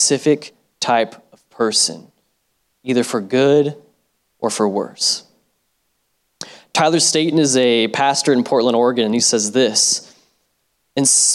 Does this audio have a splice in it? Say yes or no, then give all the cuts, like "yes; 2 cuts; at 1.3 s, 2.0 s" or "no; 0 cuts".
no; 0 cuts